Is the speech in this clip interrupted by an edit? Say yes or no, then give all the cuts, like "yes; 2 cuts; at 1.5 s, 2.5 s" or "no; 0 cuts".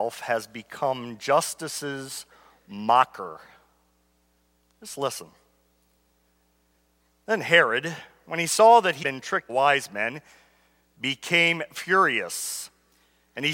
yes; 2 cuts; at 9.0 s, 9.5 s